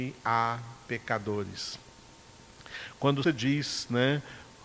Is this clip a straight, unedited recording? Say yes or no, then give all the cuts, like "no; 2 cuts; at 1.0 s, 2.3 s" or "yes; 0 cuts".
no; 1 cut; at 3.2 s